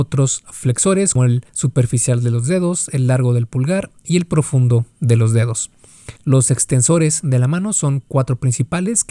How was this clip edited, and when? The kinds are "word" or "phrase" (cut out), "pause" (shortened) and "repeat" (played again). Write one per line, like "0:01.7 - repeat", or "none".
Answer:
0:01.2 - word
0:01.5 - pause
0:06.2 - pause